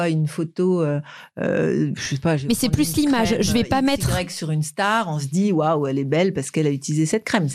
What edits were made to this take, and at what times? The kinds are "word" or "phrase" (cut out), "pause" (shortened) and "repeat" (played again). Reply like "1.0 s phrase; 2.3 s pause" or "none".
none